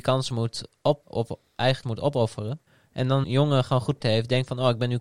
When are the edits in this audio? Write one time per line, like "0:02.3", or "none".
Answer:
0:01.0
0:01.8
0:02.7
0:03.2
0:04.0